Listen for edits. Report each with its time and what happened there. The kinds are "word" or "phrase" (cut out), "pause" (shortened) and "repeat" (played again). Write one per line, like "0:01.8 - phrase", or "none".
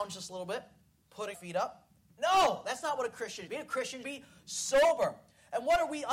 0:01.3 - word
0:03.5 - word
0:04.0 - word